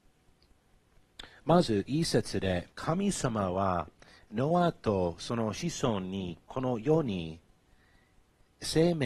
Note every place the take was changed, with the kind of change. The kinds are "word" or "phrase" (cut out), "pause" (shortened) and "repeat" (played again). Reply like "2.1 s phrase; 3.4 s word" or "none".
2.7 s pause; 6.4 s pause